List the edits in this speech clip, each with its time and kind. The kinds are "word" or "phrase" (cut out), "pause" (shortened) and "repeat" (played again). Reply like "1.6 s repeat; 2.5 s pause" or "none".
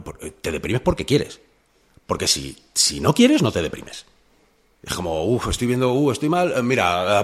none